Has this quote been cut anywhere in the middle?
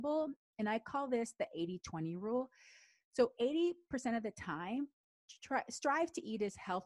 no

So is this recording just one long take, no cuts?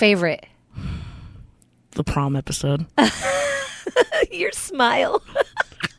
yes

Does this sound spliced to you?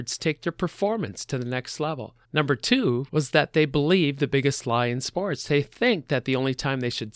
yes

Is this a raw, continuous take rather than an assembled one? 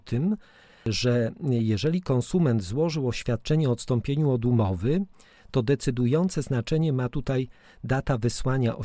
yes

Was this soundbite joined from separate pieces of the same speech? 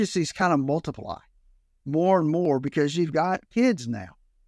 no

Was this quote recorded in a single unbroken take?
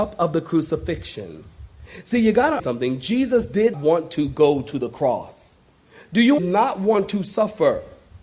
no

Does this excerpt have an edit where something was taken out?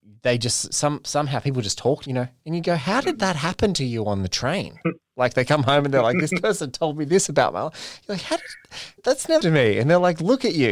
yes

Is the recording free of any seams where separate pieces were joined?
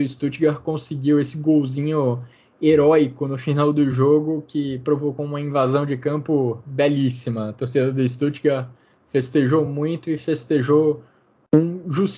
yes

